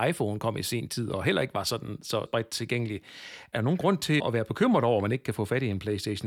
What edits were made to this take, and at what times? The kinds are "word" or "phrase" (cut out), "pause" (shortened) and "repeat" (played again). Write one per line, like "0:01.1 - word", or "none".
0:02.3 - word
0:04.2 - word